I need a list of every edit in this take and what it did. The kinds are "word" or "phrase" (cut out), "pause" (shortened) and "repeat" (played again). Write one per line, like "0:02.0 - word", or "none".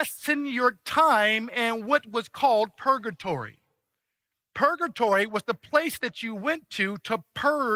none